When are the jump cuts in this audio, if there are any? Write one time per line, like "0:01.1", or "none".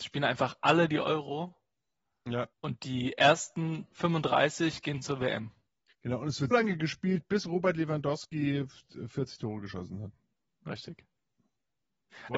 0:02.5
0:06.5